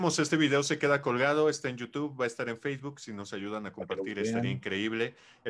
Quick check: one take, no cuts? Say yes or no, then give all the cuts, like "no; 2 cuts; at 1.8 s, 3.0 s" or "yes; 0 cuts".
yes; 0 cuts